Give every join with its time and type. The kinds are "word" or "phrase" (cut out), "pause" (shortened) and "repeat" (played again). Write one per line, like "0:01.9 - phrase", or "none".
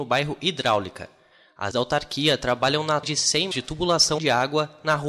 0:01.7 - word
0:03.0 - word
0:03.5 - word
0:04.2 - word

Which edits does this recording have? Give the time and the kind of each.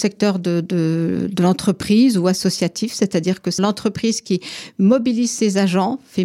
0:03.6 - word

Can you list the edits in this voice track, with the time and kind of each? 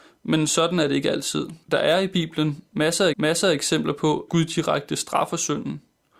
0:01.6 - pause
0:03.1 - repeat
0:04.3 - word

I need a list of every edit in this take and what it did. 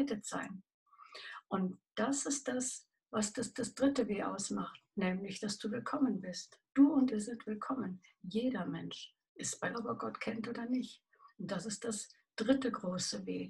0:03.5 - repeat
0:07.1 - word
0:09.7 - phrase

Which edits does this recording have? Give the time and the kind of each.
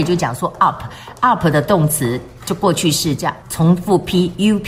0:03.4 - word

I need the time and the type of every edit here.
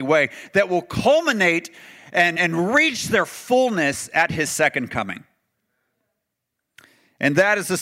0:02.4 - word

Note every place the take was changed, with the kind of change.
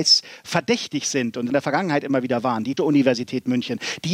0:01.5 - phrase
0:02.8 - word

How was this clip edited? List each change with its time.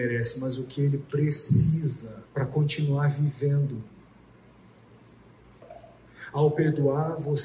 0:02.3 - pause

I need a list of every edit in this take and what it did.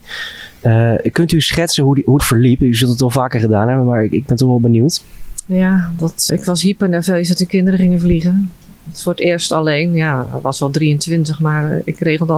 0:02.2 - phrase
0:06.3 - word

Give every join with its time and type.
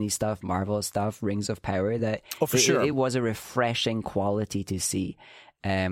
none

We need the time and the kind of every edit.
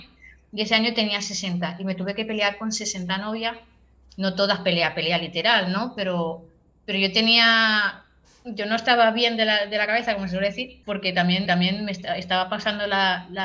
0:10.8 - pause
0:11.5 - repeat

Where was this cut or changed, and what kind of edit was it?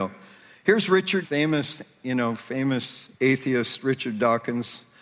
0:01.2 - word
0:03.1 - word

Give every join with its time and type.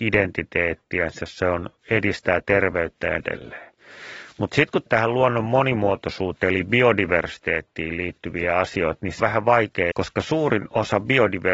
0:03.2 - word
0:04.9 - word
0:09.2 - word
0:09.9 - word

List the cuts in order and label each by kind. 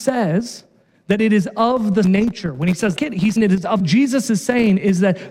0:02.0 - word
0:03.0 - word
0:03.4 - word
0:03.8 - phrase

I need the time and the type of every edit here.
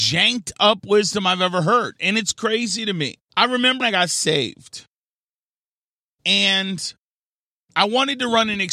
0:03.3 - pause
0:03.8 - word

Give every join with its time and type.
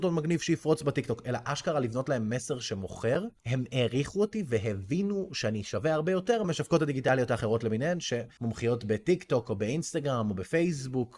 0:06.4 - word

